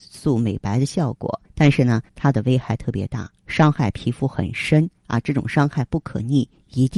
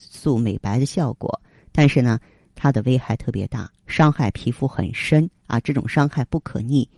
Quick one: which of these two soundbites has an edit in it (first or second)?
first